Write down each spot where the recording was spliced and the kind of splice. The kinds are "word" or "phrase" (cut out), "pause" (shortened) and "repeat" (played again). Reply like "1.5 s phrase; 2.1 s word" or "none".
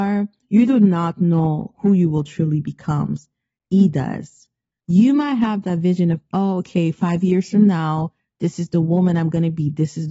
none